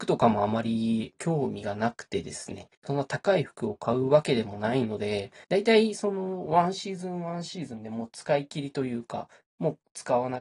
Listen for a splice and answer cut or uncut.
cut